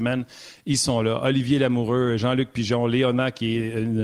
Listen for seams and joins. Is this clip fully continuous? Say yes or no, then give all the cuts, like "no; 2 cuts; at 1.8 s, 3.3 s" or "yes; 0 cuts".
yes; 0 cuts